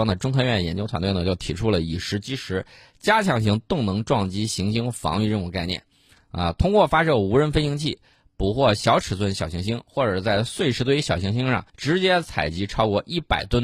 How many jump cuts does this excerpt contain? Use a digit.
1